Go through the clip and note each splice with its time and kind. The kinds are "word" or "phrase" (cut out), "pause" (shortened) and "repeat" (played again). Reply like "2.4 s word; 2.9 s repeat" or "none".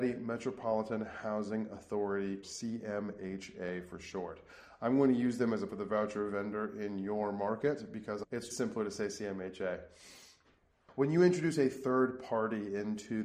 2.4 s word; 5.7 s word; 8.5 s word